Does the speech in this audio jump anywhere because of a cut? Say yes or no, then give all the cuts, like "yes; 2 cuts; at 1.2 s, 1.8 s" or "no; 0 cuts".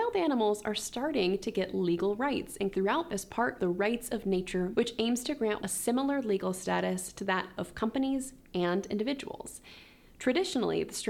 yes; 5 cuts; at 2.7 s, 3.1 s, 3.6 s, 4.7 s, 5.6 s